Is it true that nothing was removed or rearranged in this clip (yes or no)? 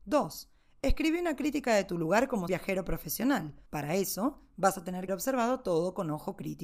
no